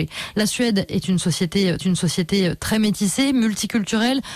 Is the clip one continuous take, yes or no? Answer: no